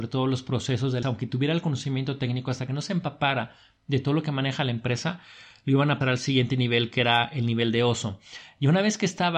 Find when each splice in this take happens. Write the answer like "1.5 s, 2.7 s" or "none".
1.0 s, 6.0 s